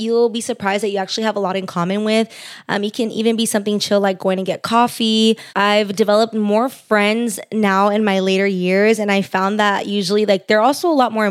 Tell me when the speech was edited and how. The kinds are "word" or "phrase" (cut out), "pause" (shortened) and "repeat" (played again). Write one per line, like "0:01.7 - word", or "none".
0:05.5 - pause